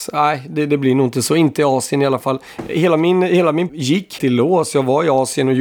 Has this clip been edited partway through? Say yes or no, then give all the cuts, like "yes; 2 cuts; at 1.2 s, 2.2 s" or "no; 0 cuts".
yes; 2 cuts; at 3.7 s, 4.2 s